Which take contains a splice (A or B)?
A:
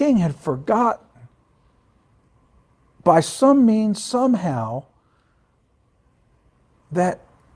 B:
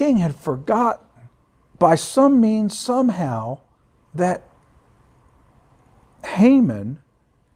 B